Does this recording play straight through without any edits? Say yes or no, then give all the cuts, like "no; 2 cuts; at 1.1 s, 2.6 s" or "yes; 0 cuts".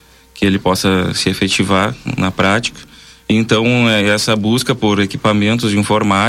yes; 0 cuts